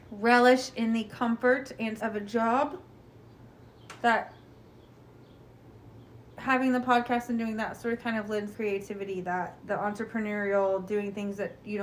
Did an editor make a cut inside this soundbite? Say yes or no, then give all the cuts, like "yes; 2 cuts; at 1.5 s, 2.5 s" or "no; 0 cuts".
yes; 5 cuts; at 2.0 s, 6.3 s, 8.0 s, 8.5 s, 9.6 s